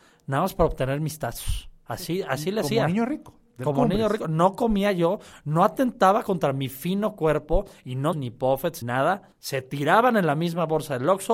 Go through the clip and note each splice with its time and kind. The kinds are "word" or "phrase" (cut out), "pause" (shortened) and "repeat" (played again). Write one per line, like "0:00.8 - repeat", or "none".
0:01.8 - pause
0:08.1 - phrase
0:08.8 - word
0:09.3 - pause